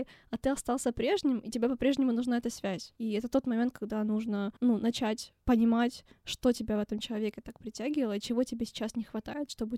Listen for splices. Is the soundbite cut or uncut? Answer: cut